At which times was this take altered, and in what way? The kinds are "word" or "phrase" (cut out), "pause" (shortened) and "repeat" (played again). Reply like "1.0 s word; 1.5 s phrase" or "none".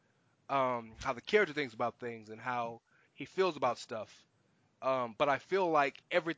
none